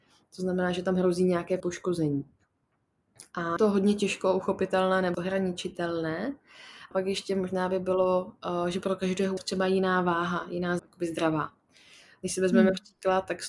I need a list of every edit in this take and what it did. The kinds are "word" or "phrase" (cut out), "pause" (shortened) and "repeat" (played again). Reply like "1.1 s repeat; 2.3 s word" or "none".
1.6 s word; 3.6 s word; 5.1 s word; 6.9 s word; 9.4 s word; 10.8 s word